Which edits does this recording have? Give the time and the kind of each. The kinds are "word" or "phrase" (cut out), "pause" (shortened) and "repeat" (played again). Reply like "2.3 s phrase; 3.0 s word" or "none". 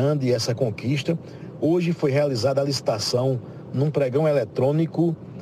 none